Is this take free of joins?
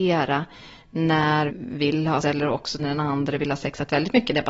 no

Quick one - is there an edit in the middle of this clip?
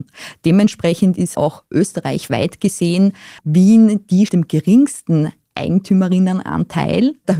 yes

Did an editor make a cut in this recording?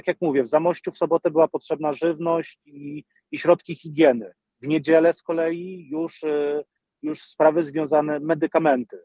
no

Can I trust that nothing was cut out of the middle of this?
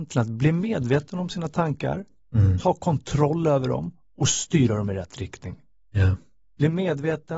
yes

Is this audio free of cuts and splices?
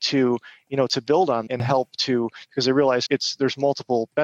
no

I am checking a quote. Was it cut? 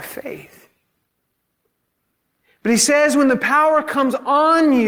no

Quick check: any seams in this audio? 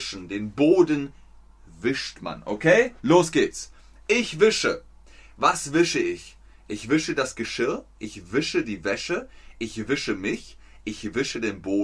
no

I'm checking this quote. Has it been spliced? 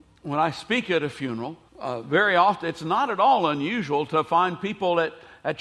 yes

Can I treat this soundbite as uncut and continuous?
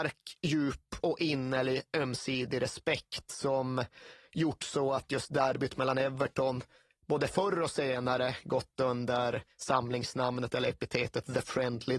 yes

